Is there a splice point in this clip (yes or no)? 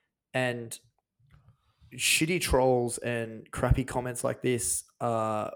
no